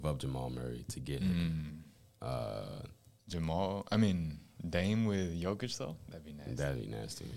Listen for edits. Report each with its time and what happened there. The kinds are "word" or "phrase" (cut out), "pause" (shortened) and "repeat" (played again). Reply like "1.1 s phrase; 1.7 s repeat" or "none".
none